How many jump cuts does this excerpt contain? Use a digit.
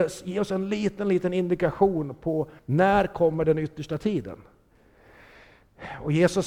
1